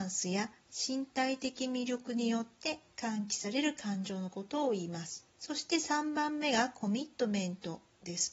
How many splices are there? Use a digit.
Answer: 1